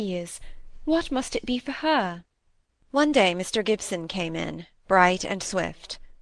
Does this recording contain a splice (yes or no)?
no